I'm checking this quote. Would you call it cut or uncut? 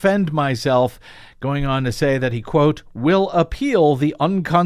uncut